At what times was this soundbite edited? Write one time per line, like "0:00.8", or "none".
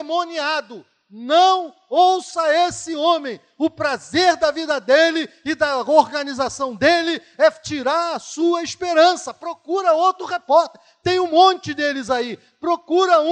none